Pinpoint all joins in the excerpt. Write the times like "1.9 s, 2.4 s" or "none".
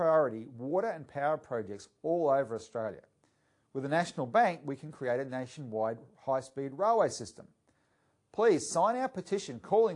none